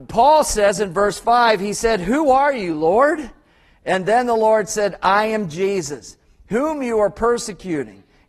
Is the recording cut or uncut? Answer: uncut